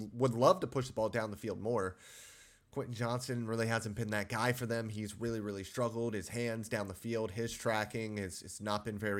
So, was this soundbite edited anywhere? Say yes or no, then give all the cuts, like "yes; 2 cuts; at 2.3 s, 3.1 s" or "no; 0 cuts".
no; 0 cuts